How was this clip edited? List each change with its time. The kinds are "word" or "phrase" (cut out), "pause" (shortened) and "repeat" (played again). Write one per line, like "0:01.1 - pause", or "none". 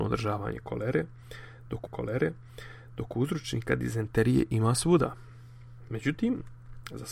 0:01.9 - repeat